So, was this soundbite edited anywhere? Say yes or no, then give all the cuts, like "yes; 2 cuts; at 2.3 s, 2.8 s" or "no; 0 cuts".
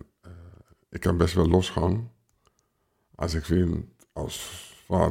no; 0 cuts